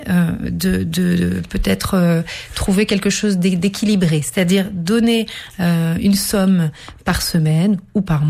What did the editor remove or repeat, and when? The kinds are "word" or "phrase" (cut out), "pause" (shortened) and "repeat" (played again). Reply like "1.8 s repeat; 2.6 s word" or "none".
none